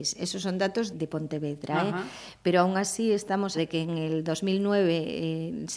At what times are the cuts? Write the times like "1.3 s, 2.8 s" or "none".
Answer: 0.9 s, 3.5 s